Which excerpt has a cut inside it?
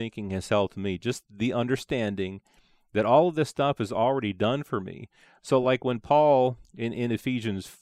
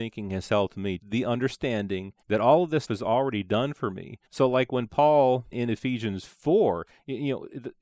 second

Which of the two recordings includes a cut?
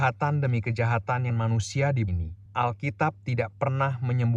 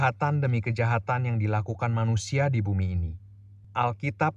first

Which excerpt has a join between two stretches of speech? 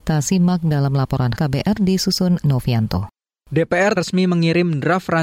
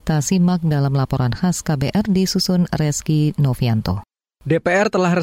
first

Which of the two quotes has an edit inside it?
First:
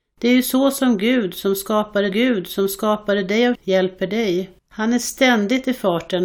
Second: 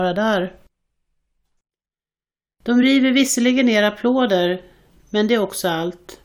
first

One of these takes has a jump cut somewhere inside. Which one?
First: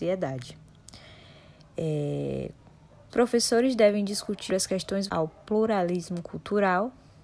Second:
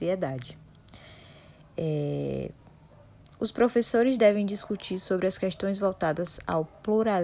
first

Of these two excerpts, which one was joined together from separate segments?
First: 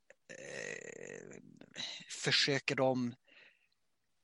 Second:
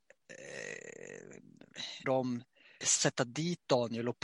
second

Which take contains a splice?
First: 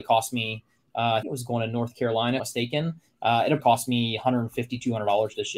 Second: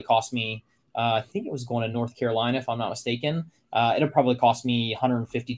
first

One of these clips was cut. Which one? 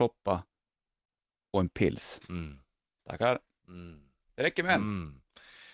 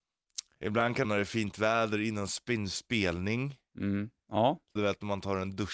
second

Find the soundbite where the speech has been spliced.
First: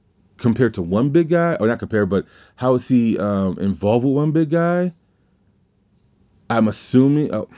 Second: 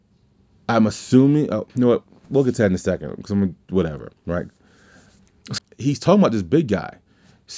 second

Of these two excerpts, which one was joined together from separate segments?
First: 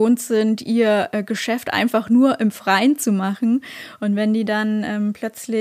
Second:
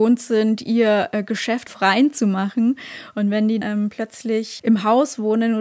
second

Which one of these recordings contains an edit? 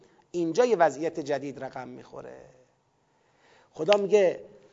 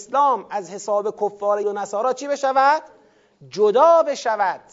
second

